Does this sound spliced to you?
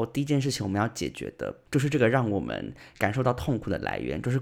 yes; 1 cut; at 1.7 s

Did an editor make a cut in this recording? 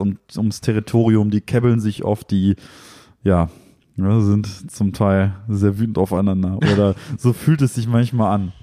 no; 0 cuts

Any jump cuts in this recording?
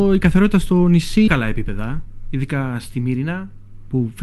yes; 1 cut; at 1.3 s

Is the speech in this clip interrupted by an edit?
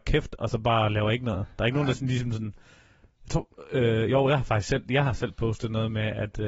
no; 0 cuts

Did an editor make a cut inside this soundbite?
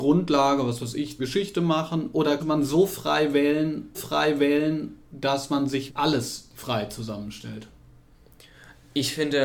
yes; 4 cuts; at 1.2 s, 2.4 s, 3.9 s, 5.9 s

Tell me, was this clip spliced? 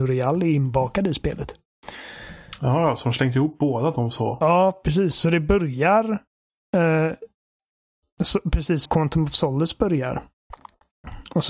yes; 1 cut; at 8.9 s

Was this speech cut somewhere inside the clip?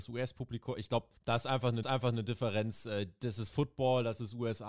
yes; 2 cuts; at 1.2 s, 1.8 s

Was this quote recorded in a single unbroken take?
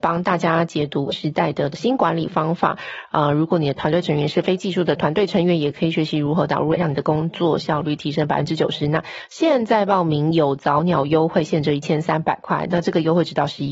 no; 2 cuts; at 1.1 s, 6.8 s

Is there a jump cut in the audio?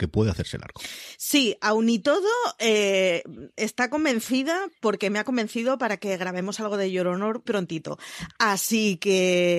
yes; 1 cut; at 7.5 s

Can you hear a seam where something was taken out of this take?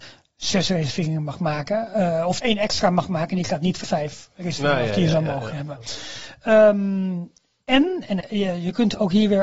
yes; 3 cuts; at 2.4 s, 3.8 s, 8.2 s

